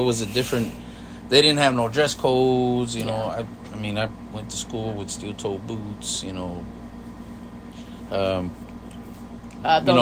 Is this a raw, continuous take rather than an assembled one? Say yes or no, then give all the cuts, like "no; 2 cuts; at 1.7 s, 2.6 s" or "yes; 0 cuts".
yes; 0 cuts